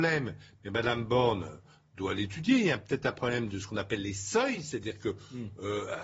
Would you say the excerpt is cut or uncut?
uncut